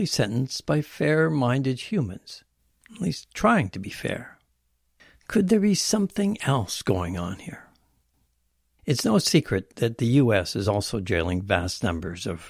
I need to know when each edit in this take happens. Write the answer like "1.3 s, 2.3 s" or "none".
none